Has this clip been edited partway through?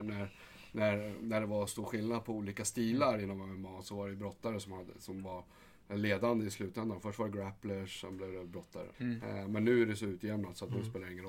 yes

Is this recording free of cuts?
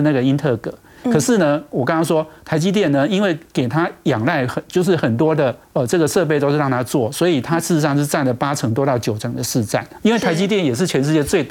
no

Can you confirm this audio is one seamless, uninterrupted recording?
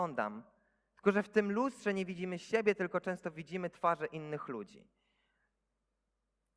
yes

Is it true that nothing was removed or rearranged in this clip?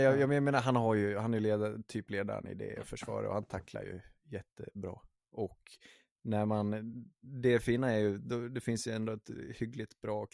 yes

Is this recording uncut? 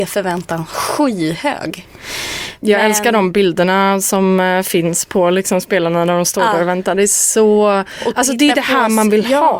yes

